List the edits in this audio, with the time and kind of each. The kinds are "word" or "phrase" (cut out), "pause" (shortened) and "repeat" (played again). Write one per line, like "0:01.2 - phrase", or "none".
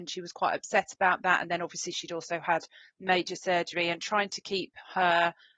none